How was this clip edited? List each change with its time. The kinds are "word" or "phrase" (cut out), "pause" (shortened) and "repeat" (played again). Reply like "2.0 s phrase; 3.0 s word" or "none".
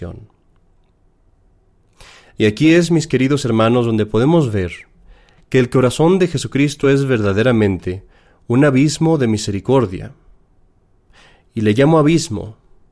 none